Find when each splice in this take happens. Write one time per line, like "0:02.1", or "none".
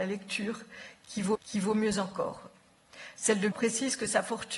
0:01.4
0:03.5